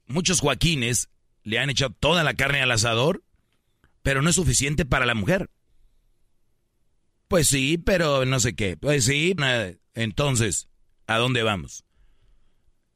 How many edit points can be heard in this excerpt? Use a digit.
1